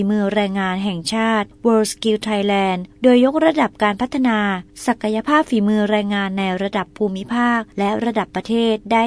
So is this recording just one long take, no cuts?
yes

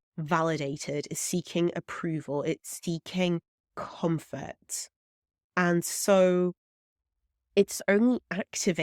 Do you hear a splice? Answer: no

